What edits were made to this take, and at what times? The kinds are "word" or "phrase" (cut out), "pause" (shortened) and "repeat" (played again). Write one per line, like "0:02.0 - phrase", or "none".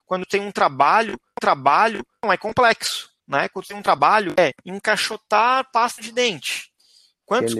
0:01.4 - repeat
0:03.2 - pause